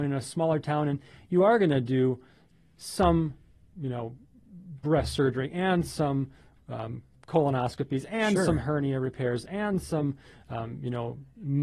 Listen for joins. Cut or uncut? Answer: uncut